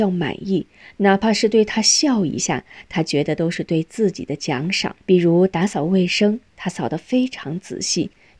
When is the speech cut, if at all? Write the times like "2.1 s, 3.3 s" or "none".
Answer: 5.0 s